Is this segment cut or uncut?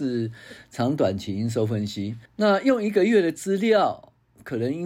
cut